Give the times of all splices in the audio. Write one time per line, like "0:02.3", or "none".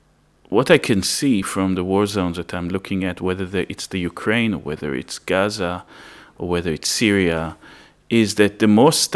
none